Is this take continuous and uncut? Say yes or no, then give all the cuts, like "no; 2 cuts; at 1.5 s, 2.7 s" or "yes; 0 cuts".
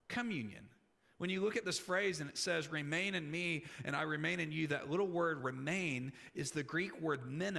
yes; 0 cuts